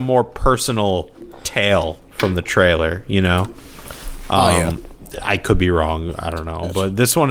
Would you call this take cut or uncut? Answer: uncut